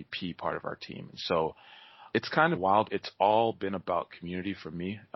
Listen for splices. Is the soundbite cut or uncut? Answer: cut